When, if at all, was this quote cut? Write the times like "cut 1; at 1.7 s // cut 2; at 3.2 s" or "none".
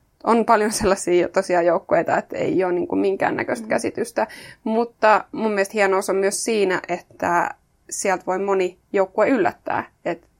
none